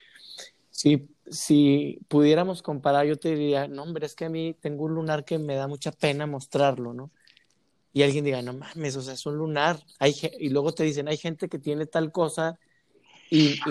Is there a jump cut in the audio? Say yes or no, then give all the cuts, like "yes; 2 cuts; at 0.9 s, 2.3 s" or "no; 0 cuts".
no; 0 cuts